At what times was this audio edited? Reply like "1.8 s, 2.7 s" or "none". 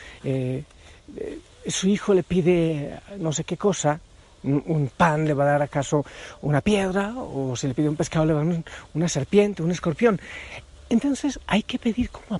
none